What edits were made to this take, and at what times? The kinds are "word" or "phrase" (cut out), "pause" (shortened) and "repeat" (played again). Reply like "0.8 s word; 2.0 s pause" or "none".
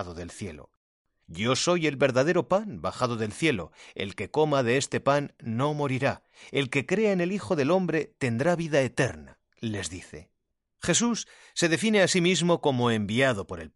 none